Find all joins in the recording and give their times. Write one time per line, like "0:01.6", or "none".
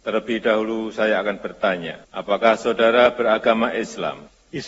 none